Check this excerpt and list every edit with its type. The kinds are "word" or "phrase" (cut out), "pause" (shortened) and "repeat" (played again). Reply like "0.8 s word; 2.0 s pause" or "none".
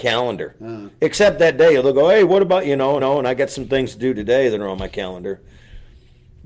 3.0 s repeat